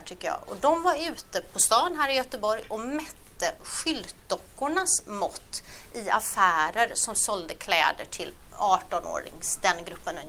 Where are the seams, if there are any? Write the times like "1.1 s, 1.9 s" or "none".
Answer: none